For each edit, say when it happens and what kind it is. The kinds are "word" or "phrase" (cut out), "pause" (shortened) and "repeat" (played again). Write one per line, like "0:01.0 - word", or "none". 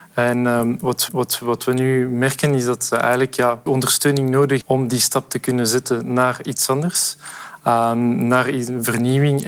0:01.1 - repeat
0:03.7 - word
0:04.6 - word